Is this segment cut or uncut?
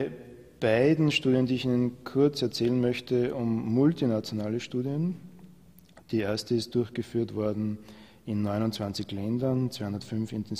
uncut